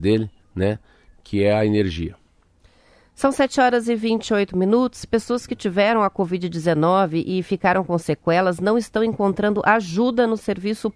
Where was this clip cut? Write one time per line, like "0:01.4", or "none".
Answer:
none